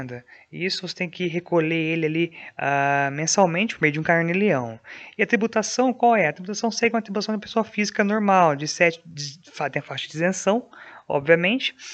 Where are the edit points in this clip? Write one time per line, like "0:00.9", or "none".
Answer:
none

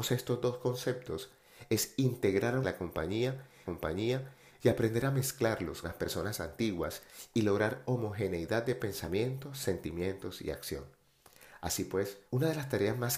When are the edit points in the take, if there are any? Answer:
0:02.6
0:03.7
0:05.8
0:12.3

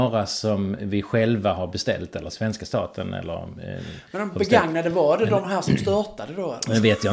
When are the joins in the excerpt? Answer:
0:02.3

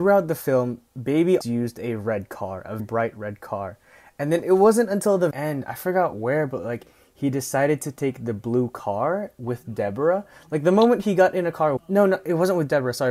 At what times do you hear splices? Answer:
0:01.4
0:02.8
0:05.3
0:11.8

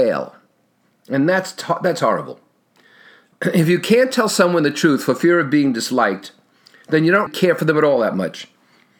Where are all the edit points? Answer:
0:07.3

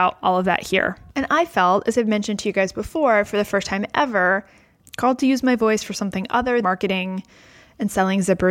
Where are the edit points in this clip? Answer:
0:04.8
0:06.6

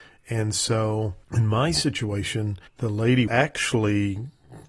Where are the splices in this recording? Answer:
0:01.2
0:02.7
0:03.3

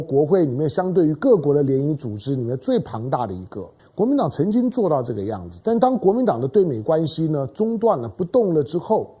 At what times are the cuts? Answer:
0:03.8

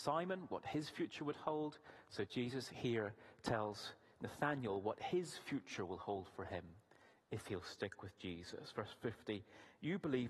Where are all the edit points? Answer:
none

